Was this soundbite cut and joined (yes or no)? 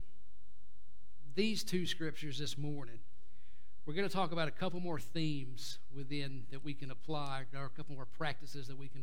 no